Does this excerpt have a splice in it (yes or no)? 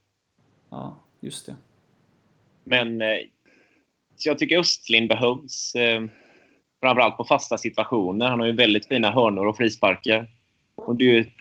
no